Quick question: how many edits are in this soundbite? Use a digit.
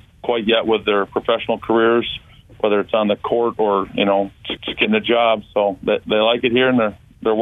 1